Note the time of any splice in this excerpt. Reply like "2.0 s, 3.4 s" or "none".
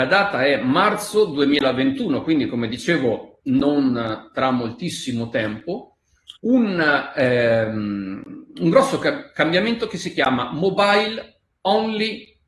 6.4 s